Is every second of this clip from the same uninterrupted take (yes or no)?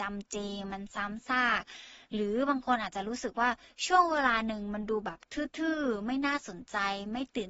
yes